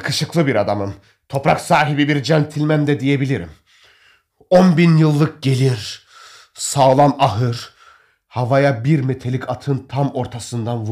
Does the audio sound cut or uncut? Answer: uncut